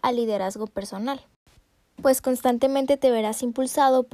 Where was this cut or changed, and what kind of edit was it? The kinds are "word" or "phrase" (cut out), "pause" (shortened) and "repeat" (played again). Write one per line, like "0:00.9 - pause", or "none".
none